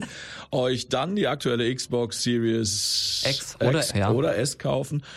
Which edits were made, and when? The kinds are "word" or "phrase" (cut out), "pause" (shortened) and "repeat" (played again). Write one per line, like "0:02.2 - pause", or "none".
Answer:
0:03.9 - word